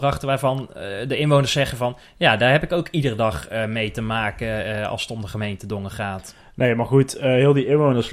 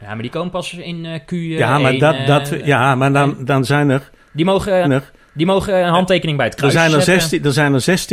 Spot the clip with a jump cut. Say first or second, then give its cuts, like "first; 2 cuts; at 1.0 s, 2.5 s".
second; 1 cut; at 4.8 s